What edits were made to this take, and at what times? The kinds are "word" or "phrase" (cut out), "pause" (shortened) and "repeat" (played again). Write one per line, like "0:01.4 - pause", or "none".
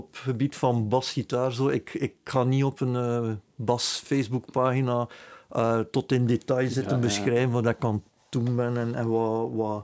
0:02.2 - pause